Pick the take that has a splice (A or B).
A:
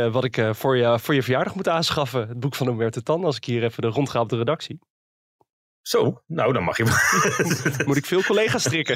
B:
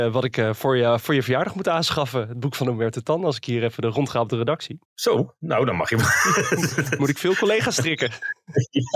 B